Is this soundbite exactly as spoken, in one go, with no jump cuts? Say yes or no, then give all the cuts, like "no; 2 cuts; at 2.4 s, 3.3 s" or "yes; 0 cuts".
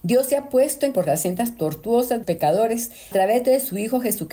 no; 3 cuts; at 0.9 s, 2.2 s, 3.1 s